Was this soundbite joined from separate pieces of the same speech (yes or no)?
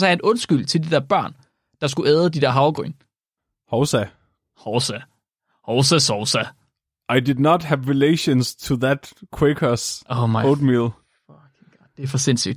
no